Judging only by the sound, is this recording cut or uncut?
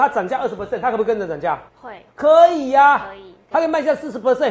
cut